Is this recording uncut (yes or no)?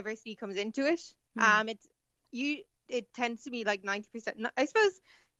yes